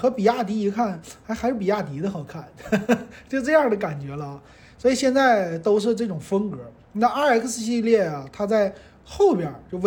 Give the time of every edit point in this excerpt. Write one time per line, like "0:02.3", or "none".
none